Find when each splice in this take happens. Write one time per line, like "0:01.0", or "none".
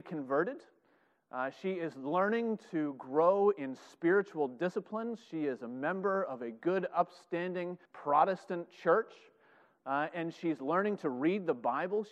0:07.9

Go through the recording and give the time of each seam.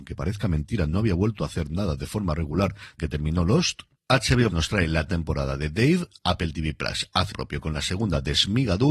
0:03.0
0:04.5
0:05.1
0:07.3

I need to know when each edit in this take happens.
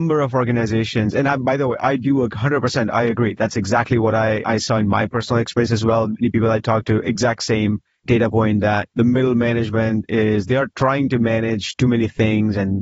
0:08.9

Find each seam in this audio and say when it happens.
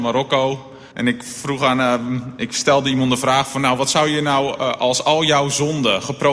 0:00.9

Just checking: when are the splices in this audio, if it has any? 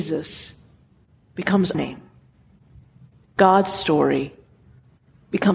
0:01.7

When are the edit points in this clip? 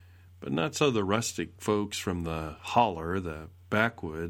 none

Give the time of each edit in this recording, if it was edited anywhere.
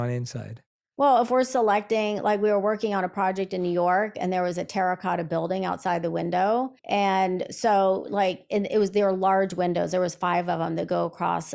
0:06.8

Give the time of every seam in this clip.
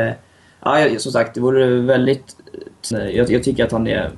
0:02.9

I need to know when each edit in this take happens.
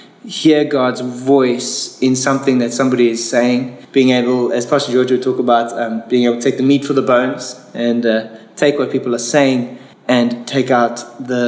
0:03.8
0:09.9

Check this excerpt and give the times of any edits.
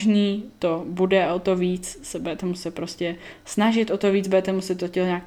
none

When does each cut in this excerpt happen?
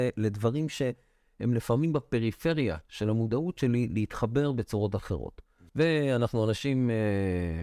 0:05.7

